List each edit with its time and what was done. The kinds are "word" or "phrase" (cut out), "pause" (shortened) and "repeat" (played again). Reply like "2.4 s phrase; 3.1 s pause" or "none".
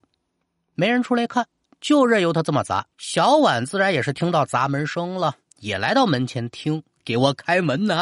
2.9 s pause